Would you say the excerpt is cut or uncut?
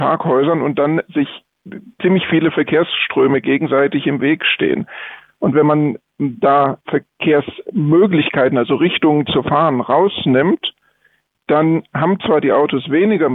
uncut